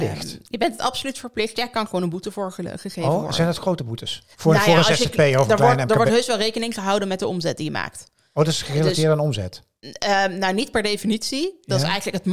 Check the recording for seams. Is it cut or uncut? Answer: cut